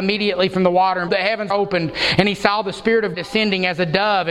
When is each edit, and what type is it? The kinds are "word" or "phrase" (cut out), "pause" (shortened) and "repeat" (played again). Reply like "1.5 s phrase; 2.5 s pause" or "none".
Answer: 1.1 s word; 1.5 s word; 3.1 s word